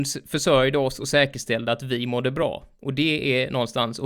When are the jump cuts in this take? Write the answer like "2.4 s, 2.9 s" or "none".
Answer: none

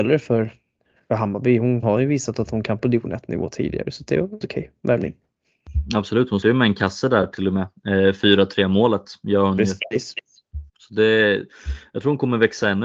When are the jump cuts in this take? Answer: 1.8 s, 2.8 s, 4.4 s, 6.4 s, 10.7 s

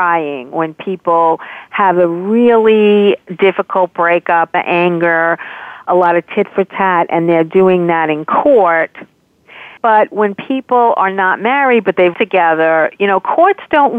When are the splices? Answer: 4.5 s, 9.8 s, 12.1 s

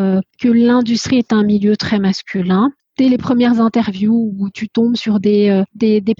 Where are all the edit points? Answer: none

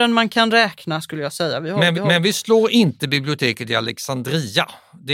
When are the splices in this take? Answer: 1.9 s

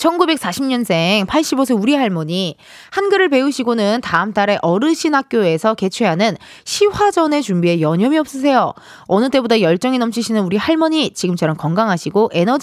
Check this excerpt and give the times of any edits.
none

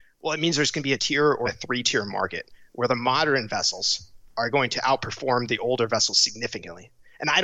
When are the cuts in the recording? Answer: 1.0 s, 1.5 s

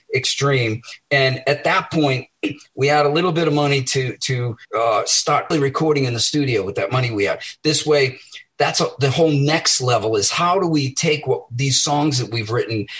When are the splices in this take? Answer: 4.6 s, 5.5 s

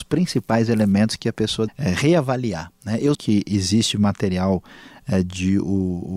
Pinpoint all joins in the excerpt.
1.7 s, 3.1 s

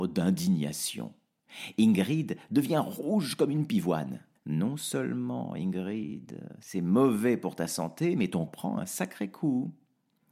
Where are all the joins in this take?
4.4 s, 8.5 s

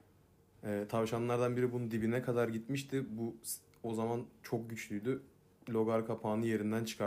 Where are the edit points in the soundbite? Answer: none

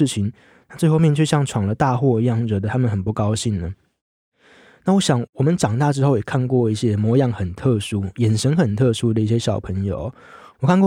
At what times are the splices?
none

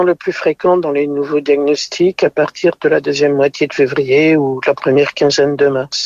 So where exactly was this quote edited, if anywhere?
none

